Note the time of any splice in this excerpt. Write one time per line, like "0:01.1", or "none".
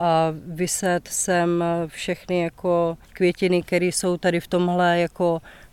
0:03.0